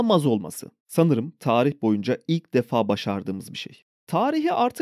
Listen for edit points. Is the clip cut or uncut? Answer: uncut